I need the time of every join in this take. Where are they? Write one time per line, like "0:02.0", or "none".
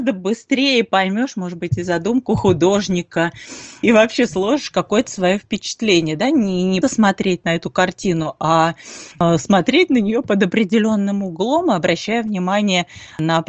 0:06.8